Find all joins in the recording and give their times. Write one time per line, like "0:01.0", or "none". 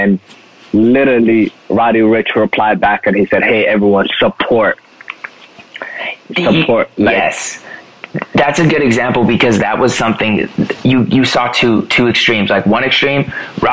0:01.6